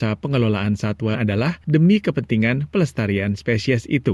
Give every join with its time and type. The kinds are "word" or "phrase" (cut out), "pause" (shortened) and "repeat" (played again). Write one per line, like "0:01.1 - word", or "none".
0:01.1 - word